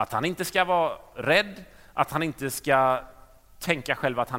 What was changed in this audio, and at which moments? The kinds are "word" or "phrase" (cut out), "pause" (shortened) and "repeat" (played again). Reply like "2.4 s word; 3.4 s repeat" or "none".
none